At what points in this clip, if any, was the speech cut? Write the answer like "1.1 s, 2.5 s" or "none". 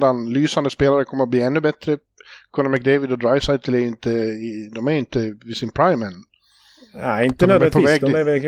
none